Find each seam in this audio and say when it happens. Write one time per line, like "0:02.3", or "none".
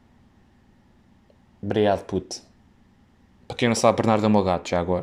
none